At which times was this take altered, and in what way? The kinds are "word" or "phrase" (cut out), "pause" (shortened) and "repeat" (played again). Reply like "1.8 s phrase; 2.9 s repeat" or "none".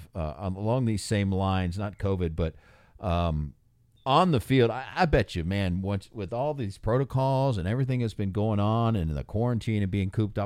none